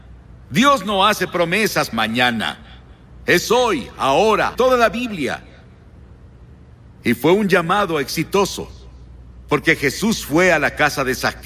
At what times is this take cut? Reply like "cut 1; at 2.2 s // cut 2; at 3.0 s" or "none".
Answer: cut 1; at 1.9 s // cut 2; at 4.5 s